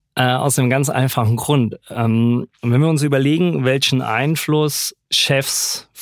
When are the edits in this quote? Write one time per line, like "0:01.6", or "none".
none